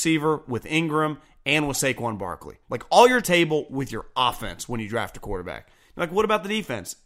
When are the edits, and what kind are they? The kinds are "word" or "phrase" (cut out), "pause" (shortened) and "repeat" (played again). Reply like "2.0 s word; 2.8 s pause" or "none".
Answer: 2.6 s pause; 3.2 s phrase